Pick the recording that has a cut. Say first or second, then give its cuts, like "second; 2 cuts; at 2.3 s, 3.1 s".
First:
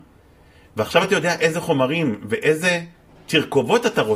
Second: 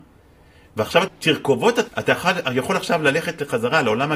second; 2 cuts; at 1.1 s, 1.9 s